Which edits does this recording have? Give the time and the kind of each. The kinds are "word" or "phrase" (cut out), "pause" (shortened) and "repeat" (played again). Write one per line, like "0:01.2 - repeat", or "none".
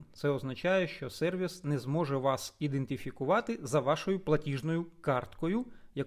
none